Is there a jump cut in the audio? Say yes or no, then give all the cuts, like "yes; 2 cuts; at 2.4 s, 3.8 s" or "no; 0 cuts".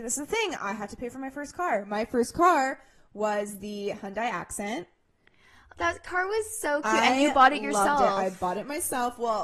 no; 0 cuts